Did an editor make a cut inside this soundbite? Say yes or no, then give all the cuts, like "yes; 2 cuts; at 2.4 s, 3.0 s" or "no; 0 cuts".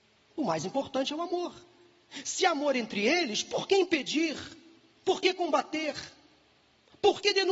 no; 0 cuts